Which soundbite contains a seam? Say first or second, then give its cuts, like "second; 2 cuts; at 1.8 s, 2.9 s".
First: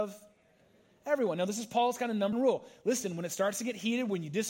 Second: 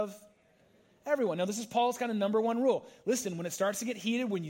first; 1 cut; at 2.3 s